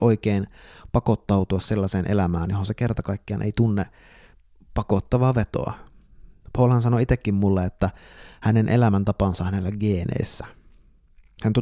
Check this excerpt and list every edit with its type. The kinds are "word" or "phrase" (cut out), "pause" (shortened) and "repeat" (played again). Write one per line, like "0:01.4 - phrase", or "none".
none